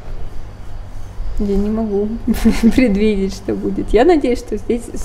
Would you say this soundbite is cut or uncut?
uncut